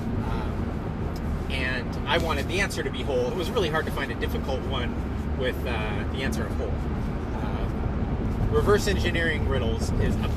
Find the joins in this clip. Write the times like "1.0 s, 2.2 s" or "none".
3.3 s